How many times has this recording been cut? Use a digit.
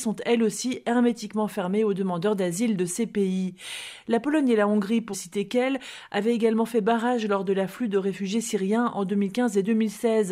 1